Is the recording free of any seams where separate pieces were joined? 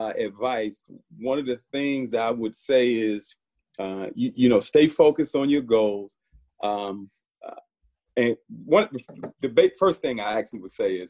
yes; 0 cuts

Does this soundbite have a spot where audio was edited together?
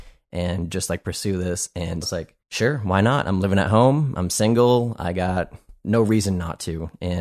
yes; 2 cuts; at 2.0 s, 2.4 s

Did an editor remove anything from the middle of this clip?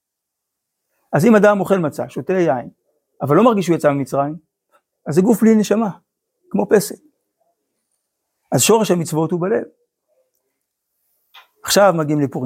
no; 0 cuts

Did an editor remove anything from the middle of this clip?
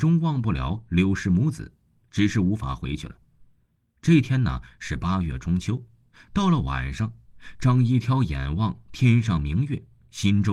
no; 0 cuts

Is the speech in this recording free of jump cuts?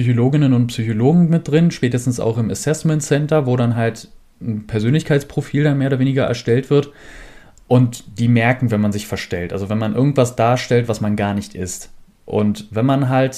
yes; 0 cuts

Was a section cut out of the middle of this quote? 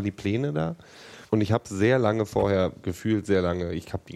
yes; 2 cuts; at 1.3 s, 2.8 s

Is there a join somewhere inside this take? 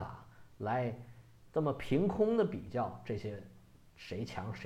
no; 0 cuts

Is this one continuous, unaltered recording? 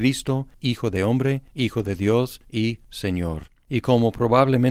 yes; 0 cuts

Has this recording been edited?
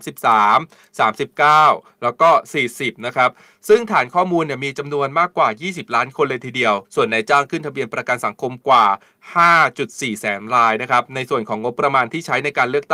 yes; 1 cut; at 6.8 s

